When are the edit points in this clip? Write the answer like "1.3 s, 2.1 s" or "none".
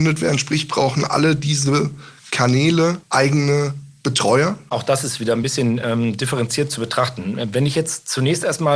none